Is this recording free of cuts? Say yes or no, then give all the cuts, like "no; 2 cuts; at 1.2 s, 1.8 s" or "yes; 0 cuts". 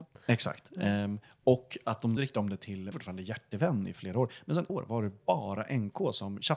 no; 3 cuts; at 2.2 s, 2.9 s, 4.7 s